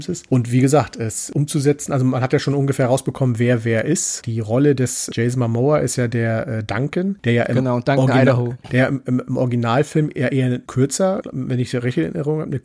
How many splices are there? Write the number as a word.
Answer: zero